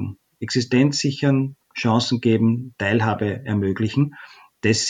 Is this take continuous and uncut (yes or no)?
yes